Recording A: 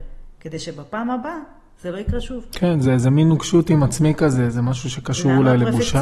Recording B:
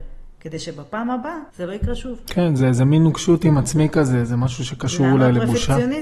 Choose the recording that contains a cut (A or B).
B